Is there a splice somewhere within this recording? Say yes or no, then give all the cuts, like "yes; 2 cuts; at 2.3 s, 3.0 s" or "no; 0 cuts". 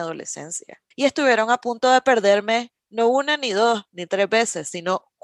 yes; 1 cut; at 0.9 s